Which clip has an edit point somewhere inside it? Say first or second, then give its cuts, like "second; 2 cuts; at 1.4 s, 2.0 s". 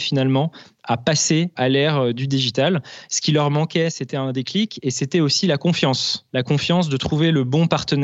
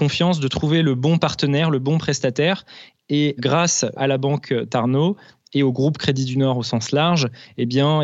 first; 1 cut; at 6.3 s